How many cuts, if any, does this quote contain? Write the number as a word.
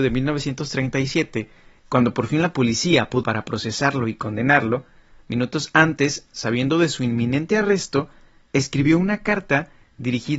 one